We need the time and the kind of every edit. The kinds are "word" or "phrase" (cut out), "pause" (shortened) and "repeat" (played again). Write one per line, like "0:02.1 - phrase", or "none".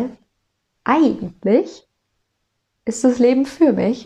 none